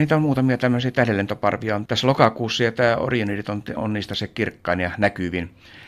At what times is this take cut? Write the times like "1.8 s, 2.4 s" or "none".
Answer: 1.9 s, 3.8 s